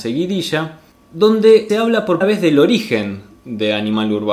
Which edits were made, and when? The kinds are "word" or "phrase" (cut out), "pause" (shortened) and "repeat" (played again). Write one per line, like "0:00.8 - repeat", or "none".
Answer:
0:01.7 - word
0:02.2 - word

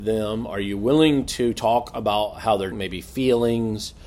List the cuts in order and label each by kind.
0:02.7 - word

